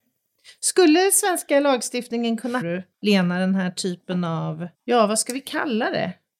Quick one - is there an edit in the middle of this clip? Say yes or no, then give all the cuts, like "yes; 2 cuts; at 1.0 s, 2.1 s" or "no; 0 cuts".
yes; 3 cuts; at 2.6 s, 2.9 s, 4.7 s